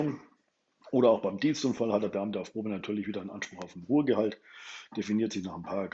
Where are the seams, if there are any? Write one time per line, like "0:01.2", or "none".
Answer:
none

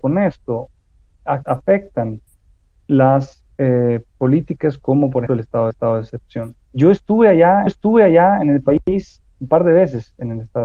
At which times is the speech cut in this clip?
0:01.4
0:03.5
0:05.3
0:05.7
0:06.6
0:07.7
0:09.3

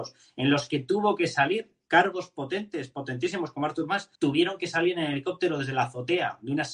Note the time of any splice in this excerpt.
0:04.2

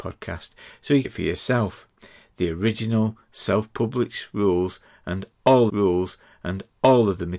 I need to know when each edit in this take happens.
0:01.0
0:05.7

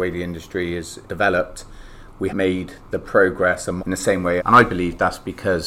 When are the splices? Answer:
0:01.0
0:02.3
0:03.8
0:04.4

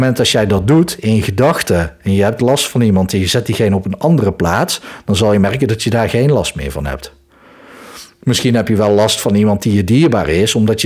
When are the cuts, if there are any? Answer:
none

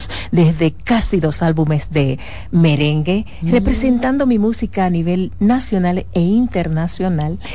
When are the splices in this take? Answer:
none

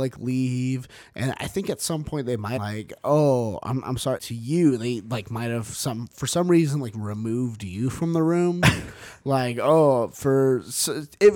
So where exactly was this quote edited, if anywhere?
0:02.6
0:04.2

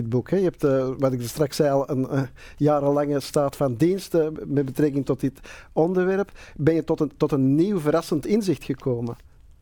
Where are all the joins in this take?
none

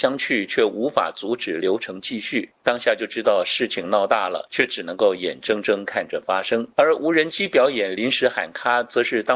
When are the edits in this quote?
0:06.7

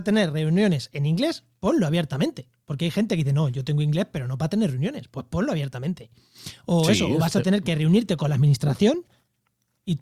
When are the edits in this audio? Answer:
none

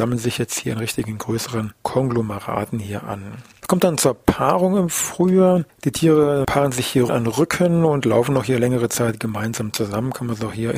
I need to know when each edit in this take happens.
0:07.1

